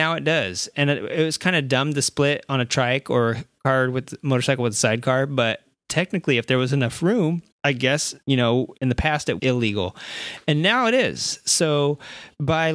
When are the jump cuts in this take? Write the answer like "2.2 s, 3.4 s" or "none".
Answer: 7.5 s, 8.2 s, 8.8 s, 9.4 s